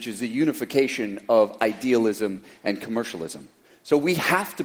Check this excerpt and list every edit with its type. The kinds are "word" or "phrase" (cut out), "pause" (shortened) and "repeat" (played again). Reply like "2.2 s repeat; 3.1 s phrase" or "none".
none